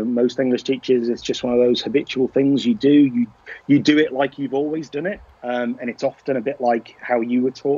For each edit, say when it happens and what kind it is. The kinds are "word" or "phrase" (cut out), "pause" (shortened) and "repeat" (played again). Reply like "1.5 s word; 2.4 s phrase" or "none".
5.3 s pause